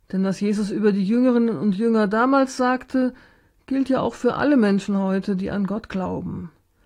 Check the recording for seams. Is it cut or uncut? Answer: uncut